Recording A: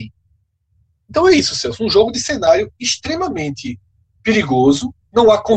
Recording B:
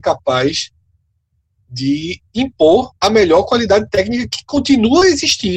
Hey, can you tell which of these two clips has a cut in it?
B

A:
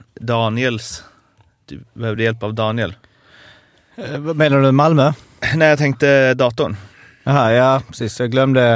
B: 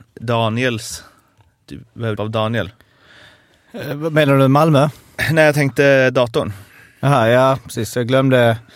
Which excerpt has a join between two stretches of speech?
B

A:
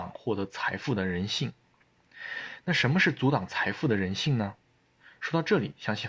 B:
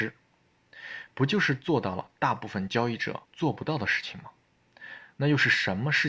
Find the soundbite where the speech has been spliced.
B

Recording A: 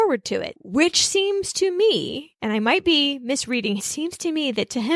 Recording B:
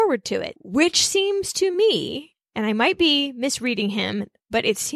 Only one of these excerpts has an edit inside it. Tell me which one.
A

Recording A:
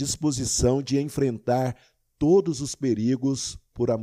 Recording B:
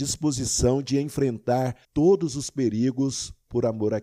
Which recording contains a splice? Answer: B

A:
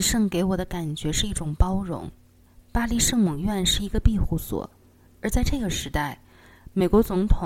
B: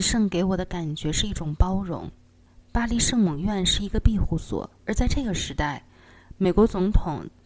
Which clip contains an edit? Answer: B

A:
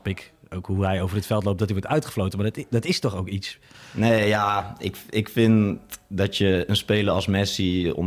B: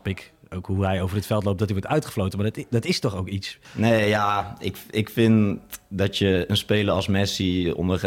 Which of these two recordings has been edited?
B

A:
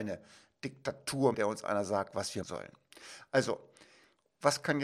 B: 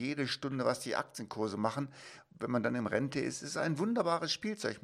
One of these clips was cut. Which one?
A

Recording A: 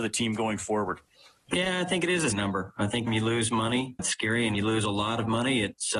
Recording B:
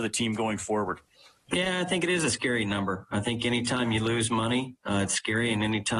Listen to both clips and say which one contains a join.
A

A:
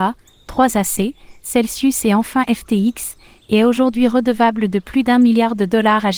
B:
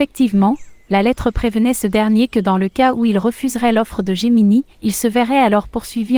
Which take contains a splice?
B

